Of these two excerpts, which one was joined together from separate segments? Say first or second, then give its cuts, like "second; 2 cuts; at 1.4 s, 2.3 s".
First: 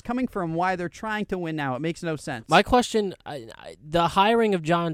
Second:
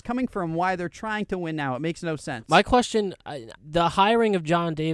second; 1 cut; at 3.6 s